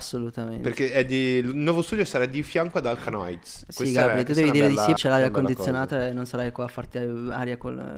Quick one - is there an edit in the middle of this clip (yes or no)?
yes